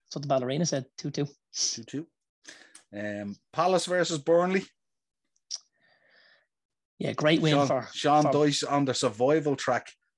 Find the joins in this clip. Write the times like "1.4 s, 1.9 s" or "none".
none